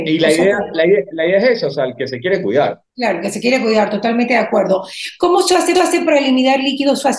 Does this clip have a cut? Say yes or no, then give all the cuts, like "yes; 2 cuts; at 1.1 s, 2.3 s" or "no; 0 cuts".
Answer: yes; 2 cuts; at 2.9 s, 5.7 s